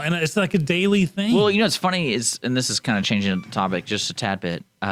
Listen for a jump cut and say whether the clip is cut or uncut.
uncut